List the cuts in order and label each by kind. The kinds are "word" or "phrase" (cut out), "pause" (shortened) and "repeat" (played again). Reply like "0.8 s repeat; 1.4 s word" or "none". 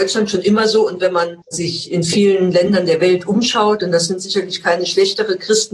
1.4 s pause